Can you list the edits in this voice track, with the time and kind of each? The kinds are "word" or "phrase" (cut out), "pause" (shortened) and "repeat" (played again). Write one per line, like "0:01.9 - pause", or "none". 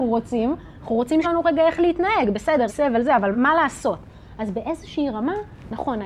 0:01.2 - word
0:02.7 - word
0:03.3 - word